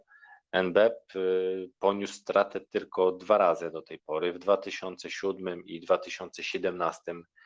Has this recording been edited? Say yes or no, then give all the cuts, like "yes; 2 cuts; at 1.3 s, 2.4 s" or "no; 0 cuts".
no; 0 cuts